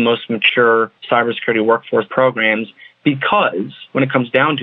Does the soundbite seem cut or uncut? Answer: cut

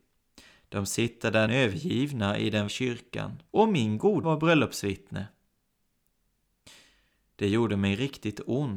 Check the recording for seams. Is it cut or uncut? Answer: cut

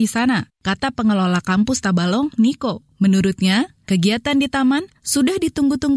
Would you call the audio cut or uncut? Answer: uncut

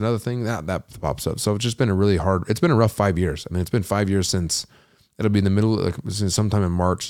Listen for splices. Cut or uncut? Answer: uncut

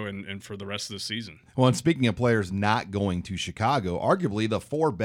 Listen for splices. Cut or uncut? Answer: uncut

